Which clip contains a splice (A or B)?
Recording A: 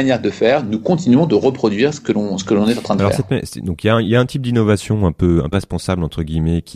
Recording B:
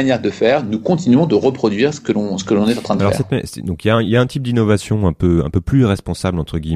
A